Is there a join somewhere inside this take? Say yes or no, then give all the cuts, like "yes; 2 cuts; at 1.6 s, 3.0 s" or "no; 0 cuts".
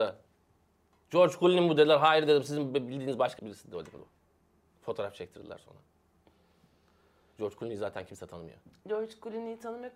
yes; 1 cut; at 3.4 s